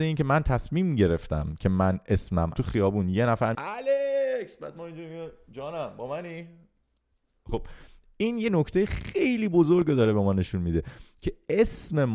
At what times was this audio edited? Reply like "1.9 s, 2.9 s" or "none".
2.6 s, 3.5 s